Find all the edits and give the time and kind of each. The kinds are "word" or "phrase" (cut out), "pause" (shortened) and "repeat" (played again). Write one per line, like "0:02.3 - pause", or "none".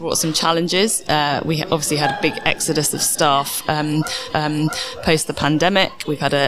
0:04.3 - repeat